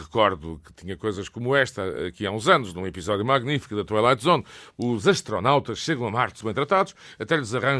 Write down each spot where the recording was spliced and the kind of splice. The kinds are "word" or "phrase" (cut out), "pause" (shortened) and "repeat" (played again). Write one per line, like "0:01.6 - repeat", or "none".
0:06.4 - word